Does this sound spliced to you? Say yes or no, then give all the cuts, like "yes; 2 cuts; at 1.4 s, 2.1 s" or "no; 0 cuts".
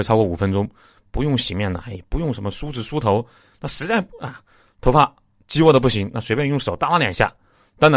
no; 0 cuts